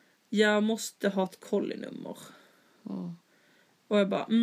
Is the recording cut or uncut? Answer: uncut